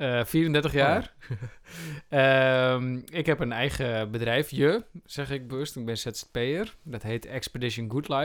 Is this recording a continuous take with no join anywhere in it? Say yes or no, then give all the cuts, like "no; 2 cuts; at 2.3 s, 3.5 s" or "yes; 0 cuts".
yes; 0 cuts